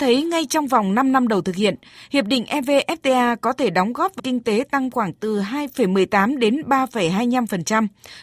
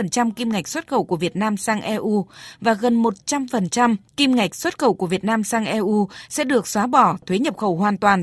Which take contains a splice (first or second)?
first